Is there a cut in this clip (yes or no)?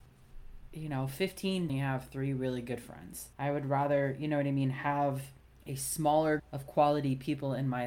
yes